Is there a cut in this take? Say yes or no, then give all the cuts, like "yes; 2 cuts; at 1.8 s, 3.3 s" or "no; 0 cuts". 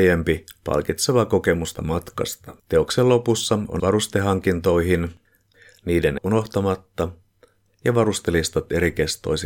yes; 4 cuts; at 1.7 s, 2.6 s, 3.8 s, 6.2 s